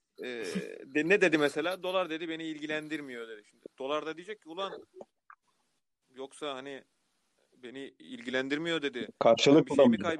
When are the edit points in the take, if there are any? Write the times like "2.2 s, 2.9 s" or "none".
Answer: none